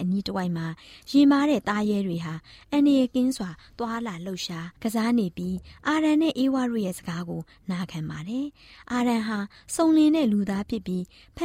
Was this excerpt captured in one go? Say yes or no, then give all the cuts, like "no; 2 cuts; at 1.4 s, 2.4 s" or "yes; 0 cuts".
yes; 0 cuts